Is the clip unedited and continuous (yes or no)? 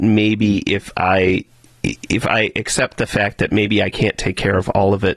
yes